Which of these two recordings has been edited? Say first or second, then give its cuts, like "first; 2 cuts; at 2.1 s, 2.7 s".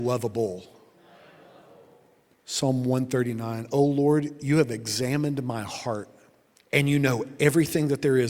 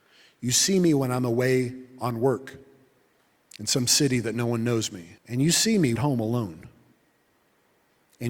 second; 2 cuts; at 5.2 s, 6.0 s